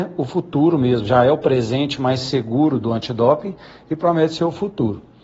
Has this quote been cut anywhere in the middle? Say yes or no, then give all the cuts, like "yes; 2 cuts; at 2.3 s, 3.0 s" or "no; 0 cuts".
no; 0 cuts